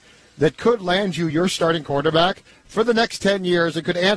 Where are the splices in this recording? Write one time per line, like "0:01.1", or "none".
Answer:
none